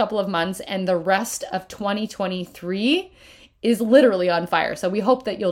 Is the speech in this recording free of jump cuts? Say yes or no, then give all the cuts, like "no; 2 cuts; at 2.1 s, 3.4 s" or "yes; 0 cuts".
yes; 0 cuts